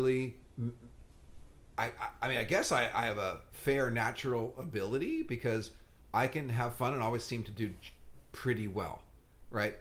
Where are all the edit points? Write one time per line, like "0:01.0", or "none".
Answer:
0:01.6